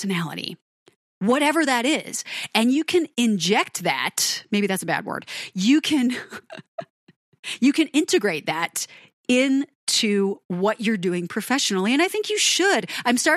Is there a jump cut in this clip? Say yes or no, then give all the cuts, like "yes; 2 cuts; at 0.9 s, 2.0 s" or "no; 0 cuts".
no; 0 cuts